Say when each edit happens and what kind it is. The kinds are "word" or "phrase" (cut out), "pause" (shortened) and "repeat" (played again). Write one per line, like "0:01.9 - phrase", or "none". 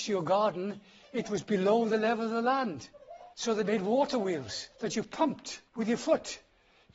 0:03.3 - pause
0:04.7 - pause
0:05.7 - pause